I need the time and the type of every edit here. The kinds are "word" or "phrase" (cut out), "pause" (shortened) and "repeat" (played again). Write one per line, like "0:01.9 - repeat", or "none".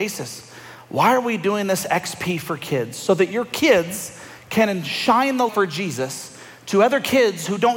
0:05.5 - word